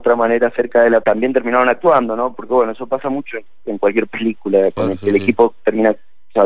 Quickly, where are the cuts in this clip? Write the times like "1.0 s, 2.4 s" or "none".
1.0 s

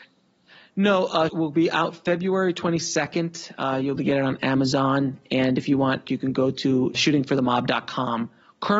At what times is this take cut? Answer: 1.3 s, 4.0 s, 6.0 s, 6.9 s

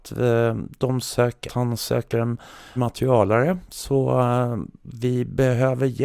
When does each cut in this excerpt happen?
1.5 s, 2.1 s, 2.8 s

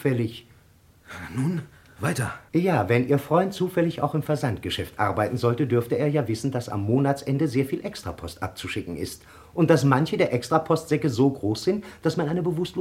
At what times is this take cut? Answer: 1.9 s

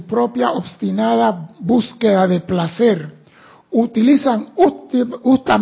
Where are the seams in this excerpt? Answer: none

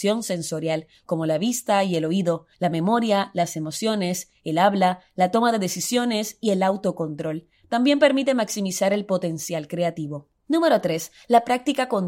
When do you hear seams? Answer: 2.5 s, 10.4 s

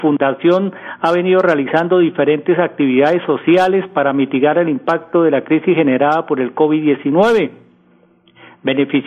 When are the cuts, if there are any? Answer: none

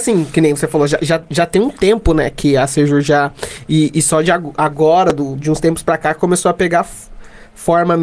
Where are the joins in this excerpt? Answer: none

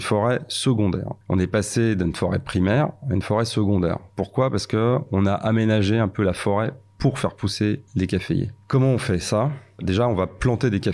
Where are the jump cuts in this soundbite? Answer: 1.2 s, 7.9 s, 8.6 s

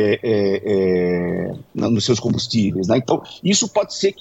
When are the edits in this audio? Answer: none

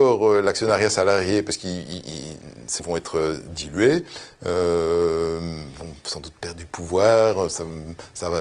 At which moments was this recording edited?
2.8 s

